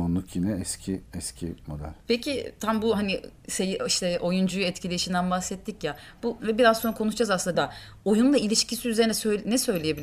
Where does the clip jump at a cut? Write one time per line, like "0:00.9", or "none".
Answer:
0:01.1
0:06.4
0:07.5